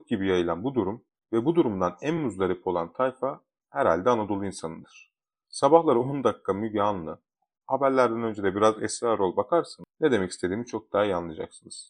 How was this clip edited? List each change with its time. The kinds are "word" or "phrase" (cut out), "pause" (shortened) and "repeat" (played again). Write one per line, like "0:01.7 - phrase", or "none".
none